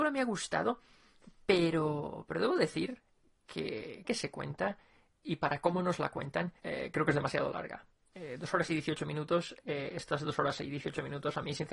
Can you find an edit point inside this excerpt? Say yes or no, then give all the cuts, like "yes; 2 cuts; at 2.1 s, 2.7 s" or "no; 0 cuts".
yes; 2 cuts; at 4.0 s, 6.6 s